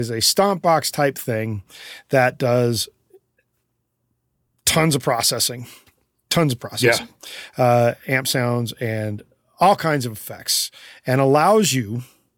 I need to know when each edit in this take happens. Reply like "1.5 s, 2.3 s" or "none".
none